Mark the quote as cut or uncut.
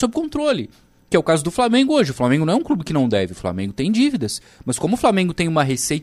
uncut